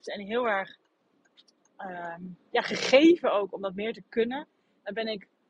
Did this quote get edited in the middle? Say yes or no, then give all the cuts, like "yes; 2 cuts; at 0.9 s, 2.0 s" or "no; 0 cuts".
no; 0 cuts